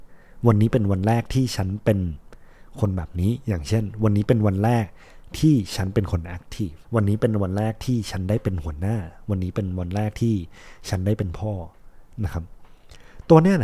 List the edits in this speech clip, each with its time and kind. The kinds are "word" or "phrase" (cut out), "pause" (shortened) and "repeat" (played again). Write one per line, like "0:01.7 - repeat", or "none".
0:06.8 - pause